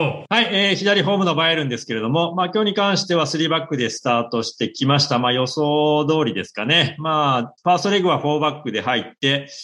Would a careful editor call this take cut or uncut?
cut